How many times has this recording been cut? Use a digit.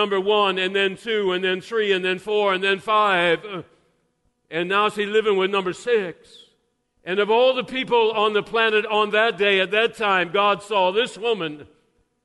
1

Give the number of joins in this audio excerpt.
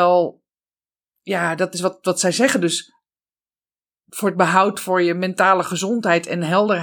0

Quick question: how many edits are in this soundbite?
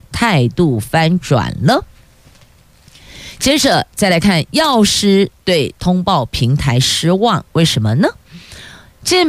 1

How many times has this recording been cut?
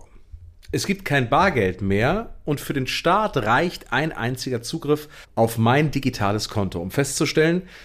1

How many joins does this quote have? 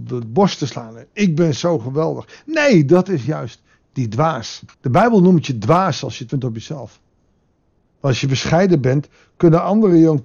2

